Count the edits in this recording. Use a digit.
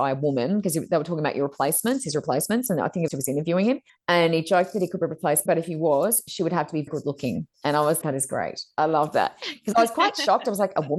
6